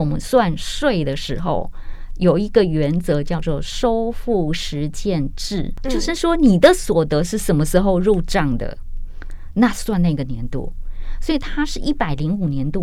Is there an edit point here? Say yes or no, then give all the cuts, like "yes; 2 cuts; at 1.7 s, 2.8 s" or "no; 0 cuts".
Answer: no; 0 cuts